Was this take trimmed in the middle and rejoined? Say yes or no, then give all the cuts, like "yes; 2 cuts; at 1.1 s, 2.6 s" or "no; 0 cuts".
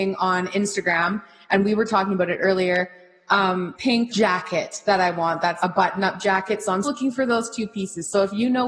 yes; 4 cuts; at 3.7 s, 4.1 s, 5.6 s, 6.8 s